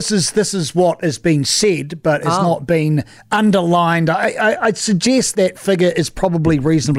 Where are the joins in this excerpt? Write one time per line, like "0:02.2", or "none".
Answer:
0:05.3